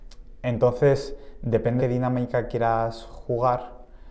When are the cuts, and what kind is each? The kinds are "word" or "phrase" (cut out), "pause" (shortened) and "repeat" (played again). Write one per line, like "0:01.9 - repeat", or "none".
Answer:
0:01.8 - word